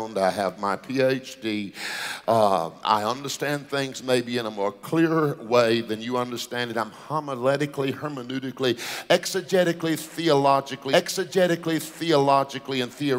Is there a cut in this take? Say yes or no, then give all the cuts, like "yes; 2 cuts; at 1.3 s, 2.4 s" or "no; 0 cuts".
yes; 1 cut; at 10.9 s